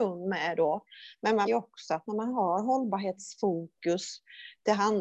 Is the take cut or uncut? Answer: cut